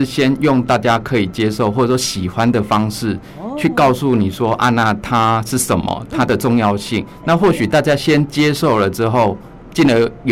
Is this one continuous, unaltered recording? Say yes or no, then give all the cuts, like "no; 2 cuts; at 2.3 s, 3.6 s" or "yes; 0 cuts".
yes; 0 cuts